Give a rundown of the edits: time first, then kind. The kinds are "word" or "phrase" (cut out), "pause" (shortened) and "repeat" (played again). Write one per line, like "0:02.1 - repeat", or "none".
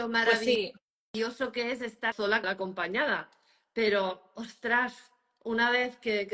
0:02.1 - phrase
0:02.4 - word